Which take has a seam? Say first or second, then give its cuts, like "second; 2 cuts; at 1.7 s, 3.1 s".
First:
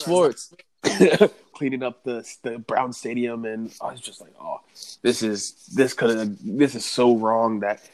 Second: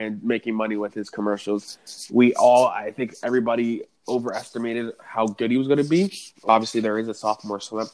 first; 1 cut; at 1.5 s